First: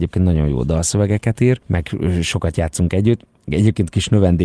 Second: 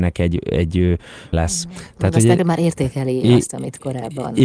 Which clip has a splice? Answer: second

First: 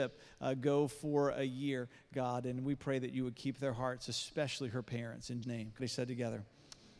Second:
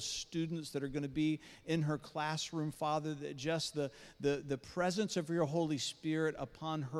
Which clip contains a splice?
first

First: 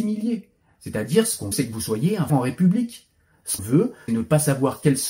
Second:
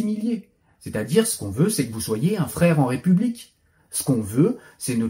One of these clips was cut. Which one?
first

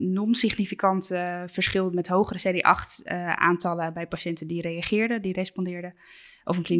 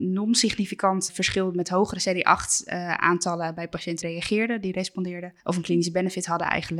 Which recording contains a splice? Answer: second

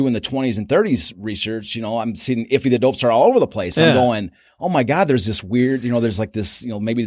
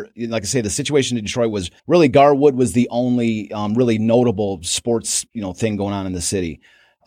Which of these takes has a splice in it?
second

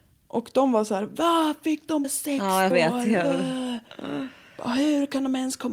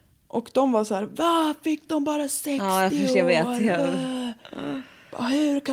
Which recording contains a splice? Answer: first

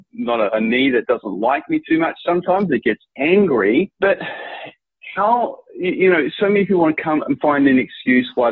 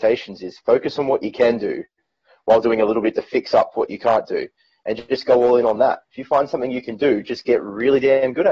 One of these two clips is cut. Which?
first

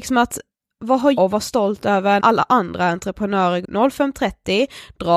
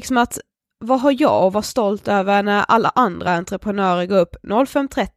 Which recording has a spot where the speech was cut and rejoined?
first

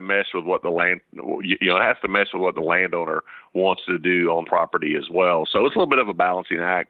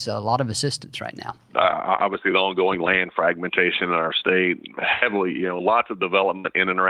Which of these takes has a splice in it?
first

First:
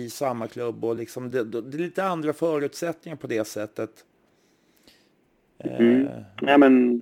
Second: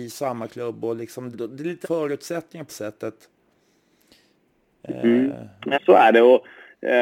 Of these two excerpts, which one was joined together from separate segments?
second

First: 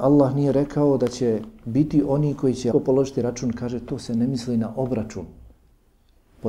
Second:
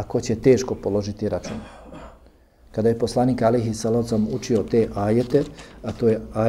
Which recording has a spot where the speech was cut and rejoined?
first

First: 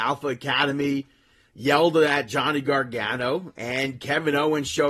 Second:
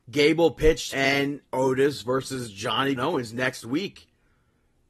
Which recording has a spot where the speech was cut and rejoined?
second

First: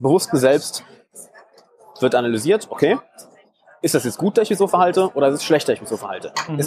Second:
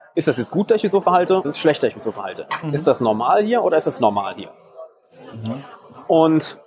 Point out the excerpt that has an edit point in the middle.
second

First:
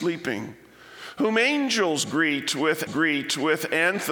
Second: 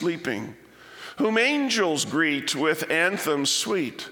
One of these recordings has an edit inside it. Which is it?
first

